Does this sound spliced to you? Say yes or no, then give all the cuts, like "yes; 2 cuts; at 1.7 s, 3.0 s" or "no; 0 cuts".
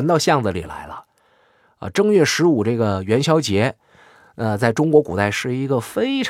no; 0 cuts